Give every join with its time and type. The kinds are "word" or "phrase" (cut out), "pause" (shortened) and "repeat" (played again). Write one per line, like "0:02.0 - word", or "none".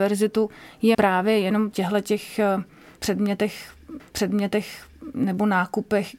0:00.9 - word
0:01.7 - phrase
0:04.0 - repeat